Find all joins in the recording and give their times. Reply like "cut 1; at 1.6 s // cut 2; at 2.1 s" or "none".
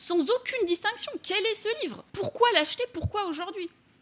cut 1; at 2.1 s